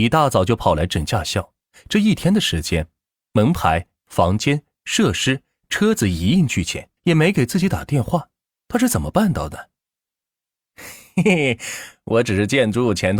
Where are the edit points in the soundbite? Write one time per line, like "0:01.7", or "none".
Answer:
0:07.0